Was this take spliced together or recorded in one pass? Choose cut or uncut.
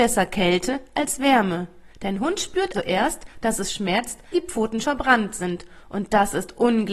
cut